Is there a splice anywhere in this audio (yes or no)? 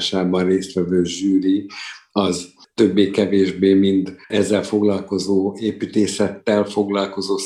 yes